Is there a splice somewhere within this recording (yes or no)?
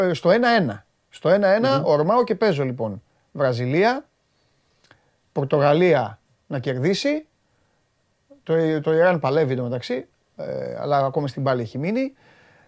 no